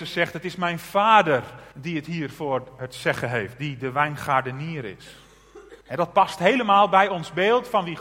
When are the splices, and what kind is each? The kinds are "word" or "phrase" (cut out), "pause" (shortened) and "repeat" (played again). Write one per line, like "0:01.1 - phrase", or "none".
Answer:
0:01.7 - pause
0:05.8 - pause

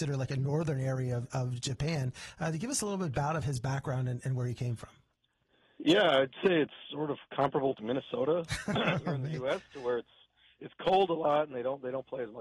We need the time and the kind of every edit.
0:07.8 - word

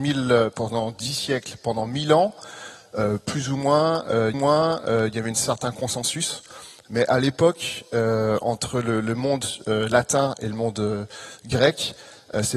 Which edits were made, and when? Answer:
0:04.3 - repeat

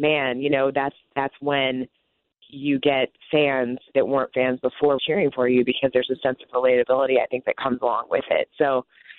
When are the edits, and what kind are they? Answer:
0:03.9 - word
0:05.0 - word

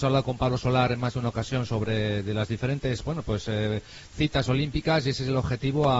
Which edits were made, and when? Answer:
none

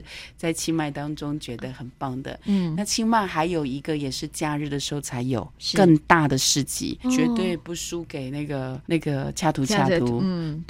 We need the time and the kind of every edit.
0:07.0 - word
0:08.8 - pause

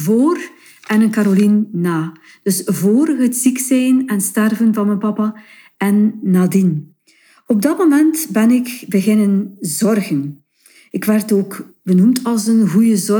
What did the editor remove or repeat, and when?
none

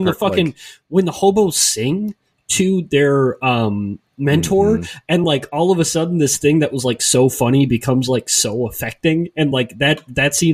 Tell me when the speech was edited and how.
none

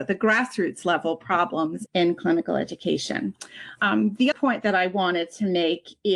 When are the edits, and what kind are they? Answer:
0:01.9 - word
0:04.3 - word

